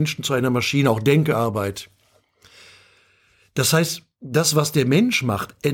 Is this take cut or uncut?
uncut